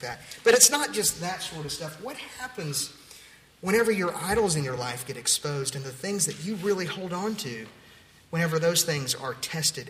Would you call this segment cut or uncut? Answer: uncut